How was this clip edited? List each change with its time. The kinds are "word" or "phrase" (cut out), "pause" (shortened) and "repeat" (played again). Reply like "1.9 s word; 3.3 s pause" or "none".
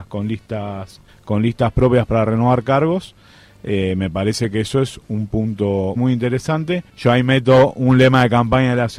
1.1 s pause; 6.0 s word; 6.9 s pause